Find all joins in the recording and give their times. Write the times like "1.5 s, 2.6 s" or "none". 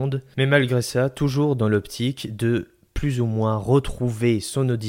none